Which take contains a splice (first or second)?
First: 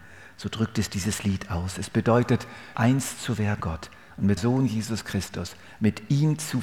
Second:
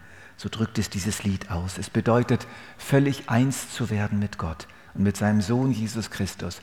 first